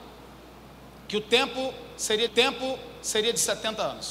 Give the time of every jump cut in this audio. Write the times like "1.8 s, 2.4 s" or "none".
2.3 s